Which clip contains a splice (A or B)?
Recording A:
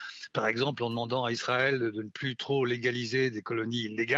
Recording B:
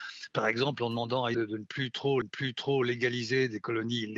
B